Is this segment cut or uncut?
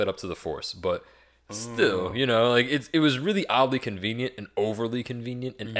uncut